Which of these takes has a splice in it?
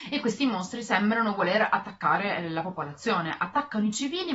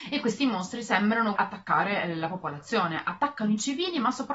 second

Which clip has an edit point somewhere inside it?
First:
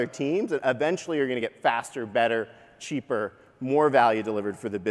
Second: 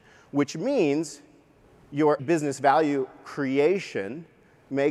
second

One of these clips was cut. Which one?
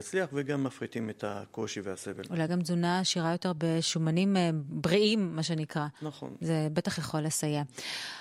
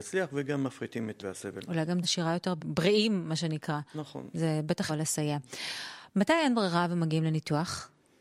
second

